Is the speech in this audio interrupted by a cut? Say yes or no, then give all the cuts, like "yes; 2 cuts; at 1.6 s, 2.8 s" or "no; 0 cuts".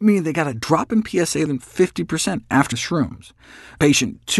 yes; 2 cuts; at 1.5 s, 2.7 s